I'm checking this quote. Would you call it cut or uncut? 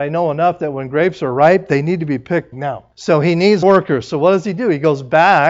cut